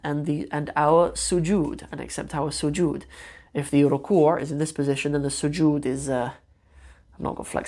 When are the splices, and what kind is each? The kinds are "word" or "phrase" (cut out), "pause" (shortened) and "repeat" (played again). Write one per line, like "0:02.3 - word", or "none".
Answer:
none